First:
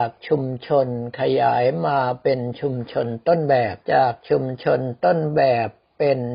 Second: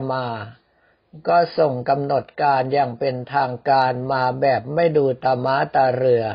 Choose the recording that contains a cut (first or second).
first